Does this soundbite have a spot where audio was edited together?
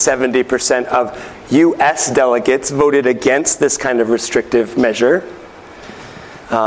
no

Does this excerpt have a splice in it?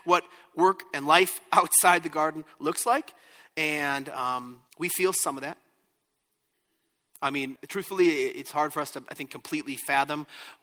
yes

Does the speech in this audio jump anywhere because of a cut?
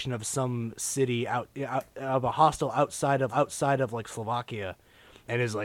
yes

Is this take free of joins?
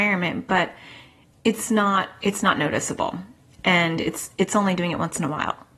yes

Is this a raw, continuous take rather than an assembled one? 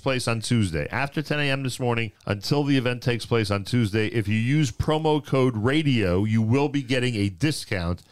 no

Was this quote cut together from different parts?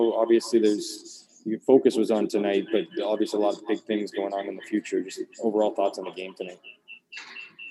no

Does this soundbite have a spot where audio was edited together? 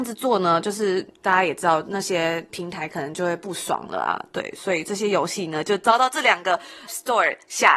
yes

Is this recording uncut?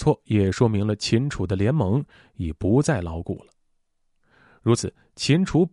yes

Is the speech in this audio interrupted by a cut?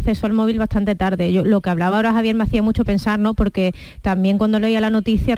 no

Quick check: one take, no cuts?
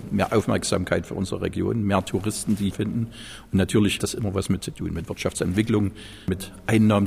no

